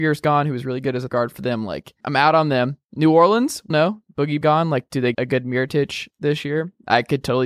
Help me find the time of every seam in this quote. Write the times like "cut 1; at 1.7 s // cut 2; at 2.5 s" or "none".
cut 1; at 1.1 s // cut 2; at 2.0 s // cut 3; at 3.7 s // cut 4; at 4.4 s // cut 5; at 5.1 s

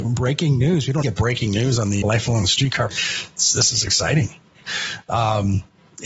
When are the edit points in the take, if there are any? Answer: cut 1; at 1.0 s // cut 2; at 2.0 s // cut 3; at 2.9 s // cut 4; at 3.9 s

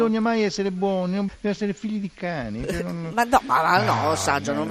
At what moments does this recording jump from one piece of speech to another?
cut 1; at 1.3 s

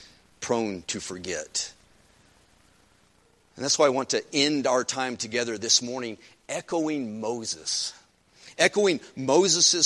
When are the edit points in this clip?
none

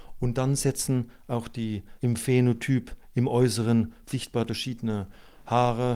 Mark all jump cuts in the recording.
cut 1; at 2.0 s // cut 2; at 4.1 s // cut 3; at 4.5 s

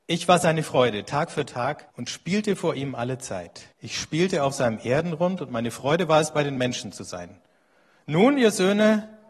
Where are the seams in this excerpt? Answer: cut 1; at 1.9 s // cut 2; at 3.7 s

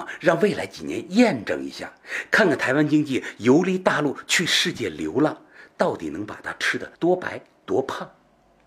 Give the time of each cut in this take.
cut 1; at 6.9 s

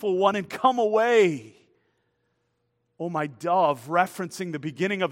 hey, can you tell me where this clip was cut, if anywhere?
none

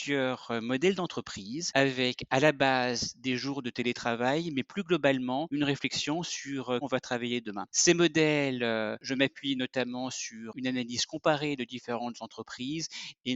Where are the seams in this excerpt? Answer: cut 1; at 6.8 s

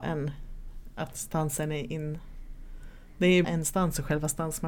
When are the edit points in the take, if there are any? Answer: cut 1; at 3.4 s

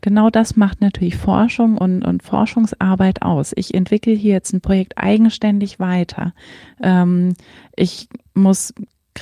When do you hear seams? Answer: none

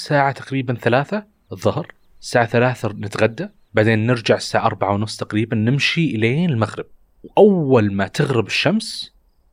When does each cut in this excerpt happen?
cut 1; at 6.9 s

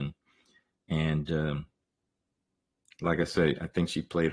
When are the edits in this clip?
none

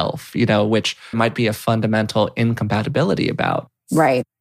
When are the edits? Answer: cut 1; at 1.1 s

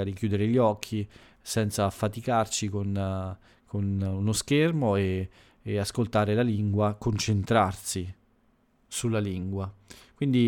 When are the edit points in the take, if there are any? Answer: none

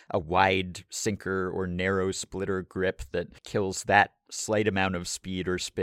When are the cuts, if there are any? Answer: cut 1; at 3.4 s

